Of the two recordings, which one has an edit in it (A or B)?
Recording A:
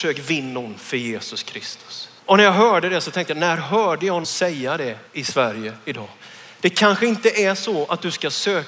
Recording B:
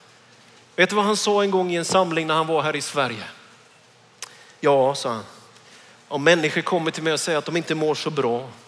A